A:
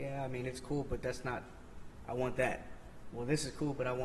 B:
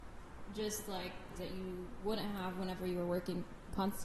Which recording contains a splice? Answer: B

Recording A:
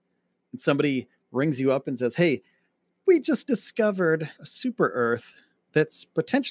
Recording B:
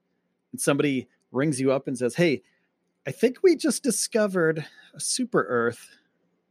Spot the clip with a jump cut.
A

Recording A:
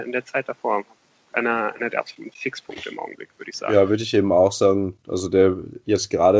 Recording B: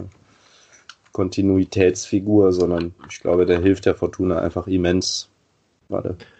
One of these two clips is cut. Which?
B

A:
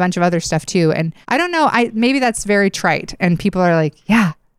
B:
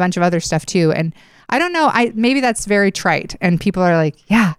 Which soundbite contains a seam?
A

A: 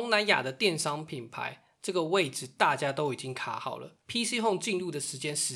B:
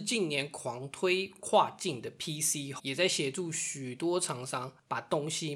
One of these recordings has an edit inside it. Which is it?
B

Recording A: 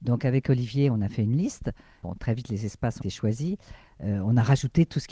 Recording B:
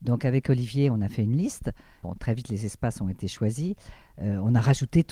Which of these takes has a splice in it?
A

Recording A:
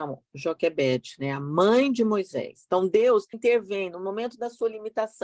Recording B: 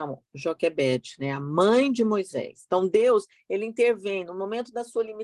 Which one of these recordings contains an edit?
A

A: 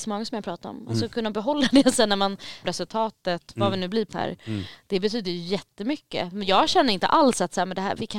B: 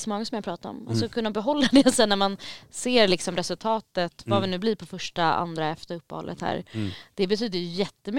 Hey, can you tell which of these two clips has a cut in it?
A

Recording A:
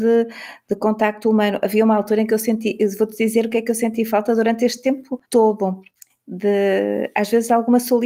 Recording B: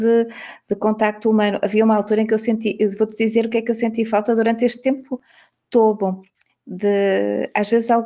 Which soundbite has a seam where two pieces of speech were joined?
A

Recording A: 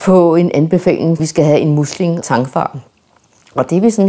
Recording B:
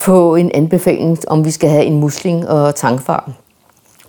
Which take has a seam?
A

